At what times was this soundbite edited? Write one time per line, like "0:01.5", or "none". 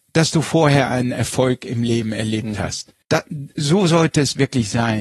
0:03.0